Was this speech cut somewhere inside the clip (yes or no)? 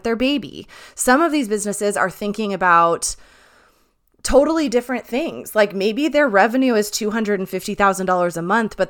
no